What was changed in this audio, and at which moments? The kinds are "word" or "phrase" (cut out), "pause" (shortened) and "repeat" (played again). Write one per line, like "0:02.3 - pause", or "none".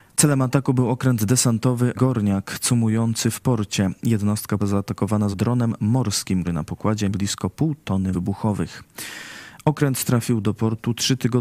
0:01.9 - word
0:04.6 - word
0:05.3 - word
0:06.4 - word
0:07.1 - word
0:08.1 - word

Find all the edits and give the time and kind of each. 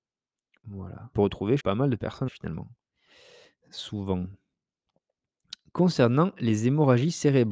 0:01.1 - word
0:01.6 - word
0:02.3 - word

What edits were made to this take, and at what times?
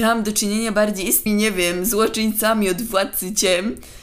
0:01.3 - word

